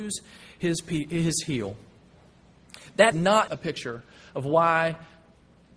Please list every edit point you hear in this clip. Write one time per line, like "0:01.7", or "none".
0:03.1
0:03.5